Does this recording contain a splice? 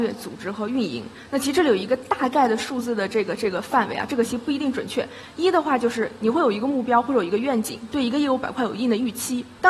no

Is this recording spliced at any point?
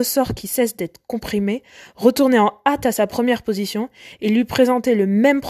no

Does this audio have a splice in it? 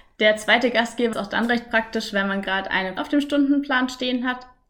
yes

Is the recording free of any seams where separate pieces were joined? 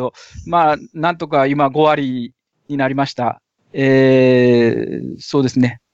yes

